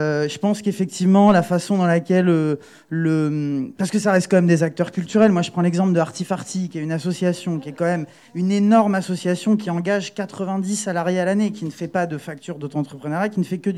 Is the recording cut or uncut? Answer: uncut